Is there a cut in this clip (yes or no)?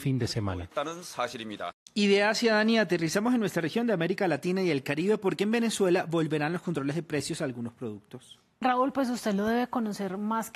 no